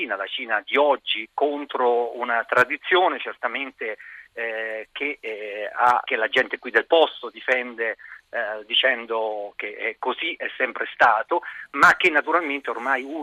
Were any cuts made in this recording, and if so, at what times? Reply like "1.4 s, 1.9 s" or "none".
6.0 s